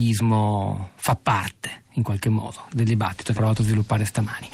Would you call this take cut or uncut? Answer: cut